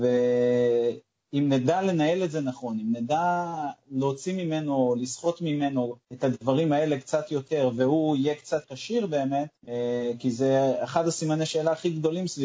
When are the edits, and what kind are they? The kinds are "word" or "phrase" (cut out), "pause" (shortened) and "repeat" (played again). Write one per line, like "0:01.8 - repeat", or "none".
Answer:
0:08.6 - word